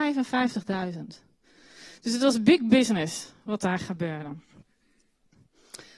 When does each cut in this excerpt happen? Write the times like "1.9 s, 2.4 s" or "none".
none